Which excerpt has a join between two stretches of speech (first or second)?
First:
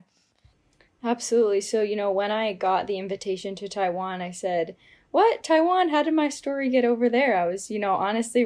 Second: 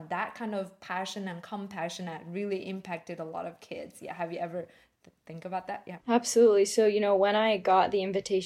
second